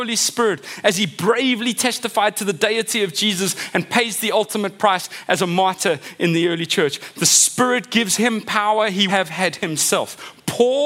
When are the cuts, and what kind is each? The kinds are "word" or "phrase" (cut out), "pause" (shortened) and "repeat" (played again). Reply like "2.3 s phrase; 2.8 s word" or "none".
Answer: 9.1 s word